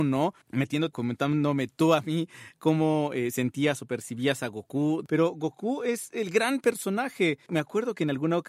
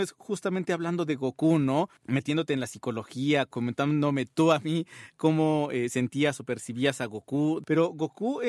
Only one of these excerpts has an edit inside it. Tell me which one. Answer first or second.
first